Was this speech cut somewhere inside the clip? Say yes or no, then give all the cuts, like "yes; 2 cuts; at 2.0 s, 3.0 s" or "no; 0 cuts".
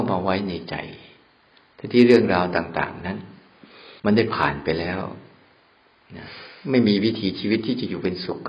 yes; 1 cut; at 4.0 s